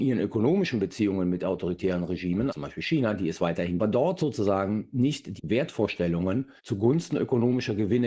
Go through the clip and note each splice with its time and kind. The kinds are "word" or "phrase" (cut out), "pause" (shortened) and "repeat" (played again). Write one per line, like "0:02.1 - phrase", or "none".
0:02.5 - word
0:03.8 - phrase
0:05.4 - phrase
0:06.6 - pause